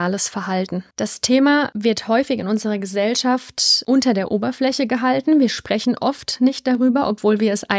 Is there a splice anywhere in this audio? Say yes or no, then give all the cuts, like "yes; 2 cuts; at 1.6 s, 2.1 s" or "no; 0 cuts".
yes; 1 cut; at 0.9 s